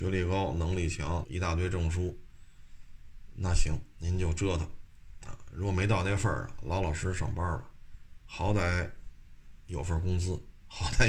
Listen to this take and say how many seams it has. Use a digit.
2